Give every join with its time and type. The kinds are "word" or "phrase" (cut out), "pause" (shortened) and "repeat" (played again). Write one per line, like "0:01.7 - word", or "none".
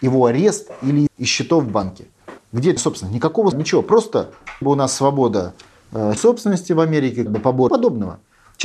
0:01.1 - word
0:02.8 - word
0:03.5 - word
0:04.6 - word
0:06.2 - word
0:07.3 - word
0:07.7 - word